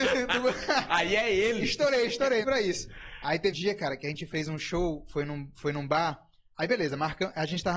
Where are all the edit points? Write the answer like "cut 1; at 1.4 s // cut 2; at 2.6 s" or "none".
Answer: cut 1; at 2.4 s // cut 2; at 3.5 s